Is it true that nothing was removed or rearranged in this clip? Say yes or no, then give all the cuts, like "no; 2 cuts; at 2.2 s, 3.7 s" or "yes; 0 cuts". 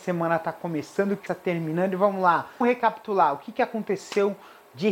no; 2 cuts; at 1.3 s, 2.6 s